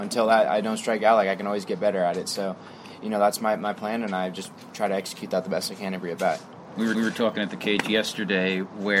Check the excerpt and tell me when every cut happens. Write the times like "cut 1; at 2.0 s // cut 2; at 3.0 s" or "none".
cut 1; at 6.9 s